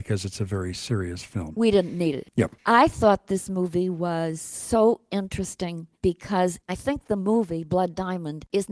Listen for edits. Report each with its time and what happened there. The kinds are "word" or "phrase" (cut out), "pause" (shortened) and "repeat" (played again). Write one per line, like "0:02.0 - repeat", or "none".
0:02.6 - pause
0:06.6 - pause